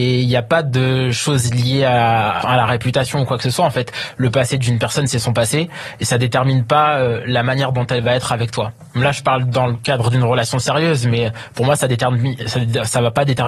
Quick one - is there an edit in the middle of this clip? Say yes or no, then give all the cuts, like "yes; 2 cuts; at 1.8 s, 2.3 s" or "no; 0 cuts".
yes; 1 cut; at 2.4 s